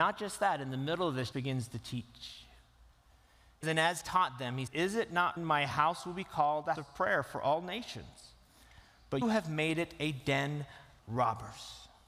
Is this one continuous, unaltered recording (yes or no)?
no